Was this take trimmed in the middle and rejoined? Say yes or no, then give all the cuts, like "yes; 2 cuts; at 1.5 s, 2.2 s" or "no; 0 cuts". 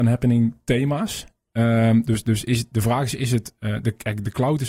no; 0 cuts